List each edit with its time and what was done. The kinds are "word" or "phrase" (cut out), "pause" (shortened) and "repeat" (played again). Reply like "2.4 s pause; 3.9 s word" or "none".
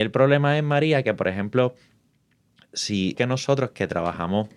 3.1 s word

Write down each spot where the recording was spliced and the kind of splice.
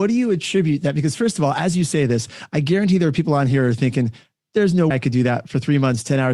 4.9 s word

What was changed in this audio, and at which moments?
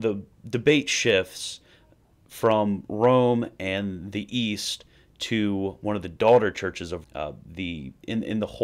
7.0 s word

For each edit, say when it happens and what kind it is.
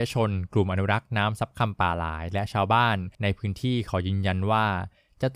3.1 s pause

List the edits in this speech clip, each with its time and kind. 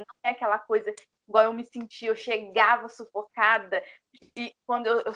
none

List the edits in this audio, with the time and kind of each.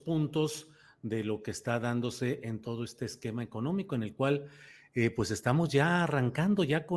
none

